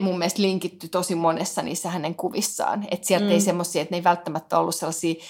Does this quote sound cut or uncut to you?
uncut